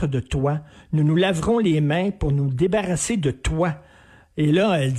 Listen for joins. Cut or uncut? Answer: uncut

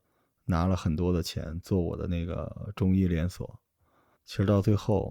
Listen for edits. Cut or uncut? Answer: uncut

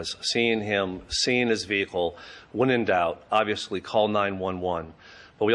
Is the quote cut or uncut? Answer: uncut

